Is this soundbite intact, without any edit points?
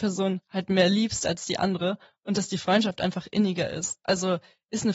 yes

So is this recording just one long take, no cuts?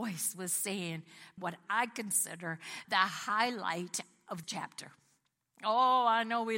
no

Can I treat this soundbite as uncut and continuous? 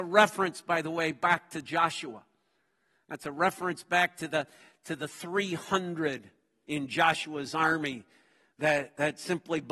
yes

